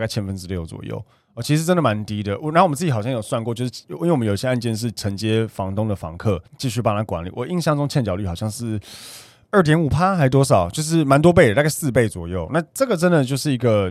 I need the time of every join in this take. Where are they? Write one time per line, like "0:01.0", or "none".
0:06.5